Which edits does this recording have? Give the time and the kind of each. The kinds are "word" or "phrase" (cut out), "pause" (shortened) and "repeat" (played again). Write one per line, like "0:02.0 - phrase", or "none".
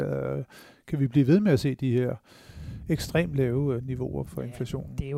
0:04.2 - word